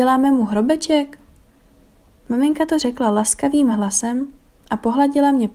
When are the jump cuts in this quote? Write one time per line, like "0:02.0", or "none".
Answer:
none